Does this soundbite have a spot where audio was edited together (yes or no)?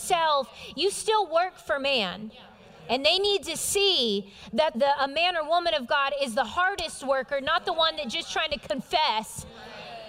yes